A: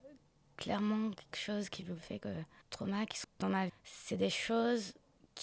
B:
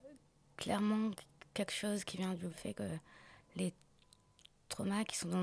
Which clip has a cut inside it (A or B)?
A